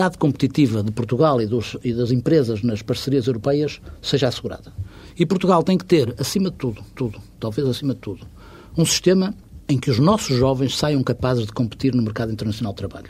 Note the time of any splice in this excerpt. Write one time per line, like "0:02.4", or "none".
0:06.9